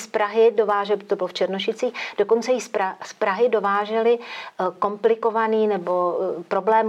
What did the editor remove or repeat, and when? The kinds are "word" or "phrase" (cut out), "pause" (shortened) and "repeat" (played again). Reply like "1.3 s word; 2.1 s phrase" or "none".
none